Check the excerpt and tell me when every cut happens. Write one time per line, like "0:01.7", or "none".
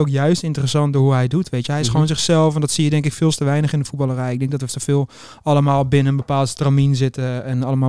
0:04.7

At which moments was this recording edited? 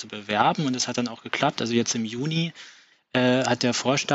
none

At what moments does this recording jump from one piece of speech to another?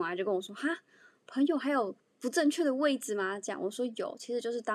0:02.0

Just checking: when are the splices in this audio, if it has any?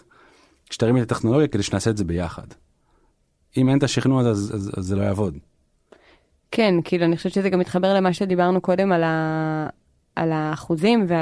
none

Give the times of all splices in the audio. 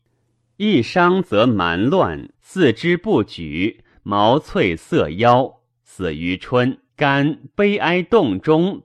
0:02.3
0:06.9

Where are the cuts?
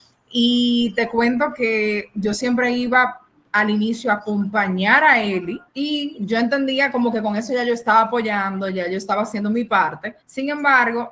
0:05.7
0:10.2

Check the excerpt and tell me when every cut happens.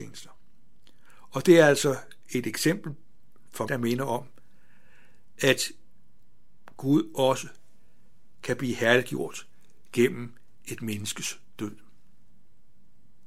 0:03.7

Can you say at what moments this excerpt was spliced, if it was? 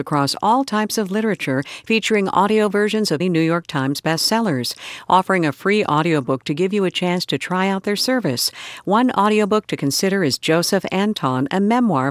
0:03.2

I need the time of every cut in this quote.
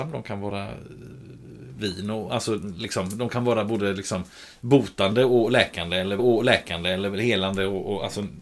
0:06.2

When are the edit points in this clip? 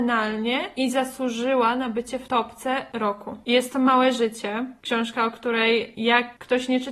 none

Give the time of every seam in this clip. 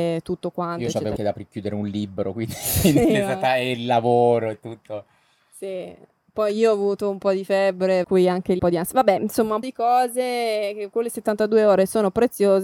0:01.2
0:08.0
0:08.6
0:09.6

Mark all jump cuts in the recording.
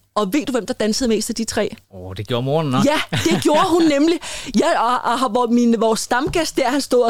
0:01.8

